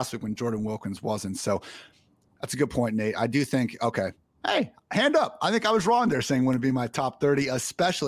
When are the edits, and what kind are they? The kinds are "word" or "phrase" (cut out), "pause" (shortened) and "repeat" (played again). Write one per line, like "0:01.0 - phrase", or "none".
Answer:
none